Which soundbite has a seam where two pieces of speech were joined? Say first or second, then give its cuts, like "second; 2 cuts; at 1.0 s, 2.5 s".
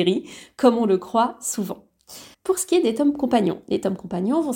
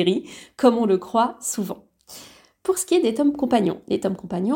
first; 1 cut; at 2.3 s